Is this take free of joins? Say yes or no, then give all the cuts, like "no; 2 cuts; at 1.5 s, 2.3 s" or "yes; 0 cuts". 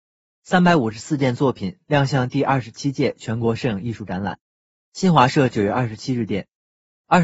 yes; 0 cuts